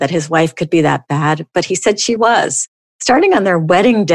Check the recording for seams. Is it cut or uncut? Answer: cut